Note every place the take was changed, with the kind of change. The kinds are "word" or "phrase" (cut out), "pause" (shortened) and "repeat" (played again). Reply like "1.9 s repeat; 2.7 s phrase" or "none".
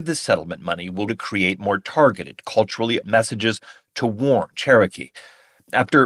1.1 s word; 3.0 s word; 4.5 s phrase